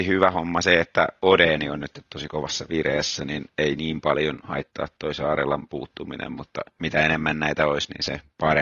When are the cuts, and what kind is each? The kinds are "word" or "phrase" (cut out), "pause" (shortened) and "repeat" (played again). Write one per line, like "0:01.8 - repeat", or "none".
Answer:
none

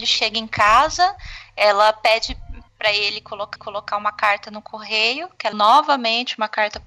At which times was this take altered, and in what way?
0:03.6 - repeat
0:05.5 - word

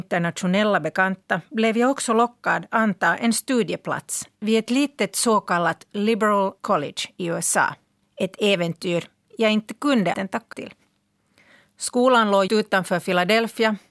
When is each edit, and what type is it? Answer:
0:02.7 - word
0:04.3 - pause
0:06.6 - word
0:08.0 - pause
0:10.1 - word
0:10.5 - word
0:12.5 - word

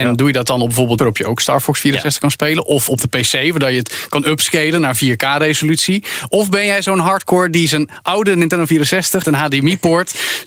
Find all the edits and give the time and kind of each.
0:01.0 - phrase
0:09.2 - phrase

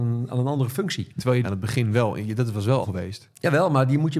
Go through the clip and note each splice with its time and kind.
0:01.1 - pause
0:01.4 - phrase
0:02.8 - phrase

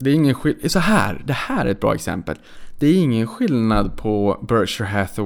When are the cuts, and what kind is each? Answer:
none

